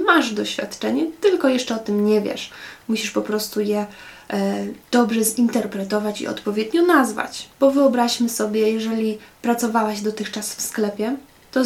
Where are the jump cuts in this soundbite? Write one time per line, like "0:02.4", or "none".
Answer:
0:04.8
0:07.5